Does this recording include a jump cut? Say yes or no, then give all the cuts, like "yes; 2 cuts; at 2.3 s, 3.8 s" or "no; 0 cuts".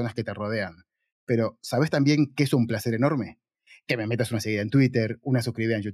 no; 0 cuts